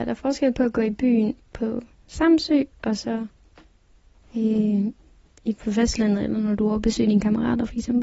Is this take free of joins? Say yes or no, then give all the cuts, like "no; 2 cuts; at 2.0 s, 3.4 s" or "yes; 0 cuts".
yes; 0 cuts